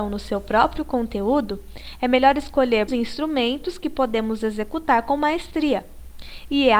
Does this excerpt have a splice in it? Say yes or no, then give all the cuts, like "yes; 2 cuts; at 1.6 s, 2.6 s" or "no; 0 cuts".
yes; 1 cut; at 2.9 s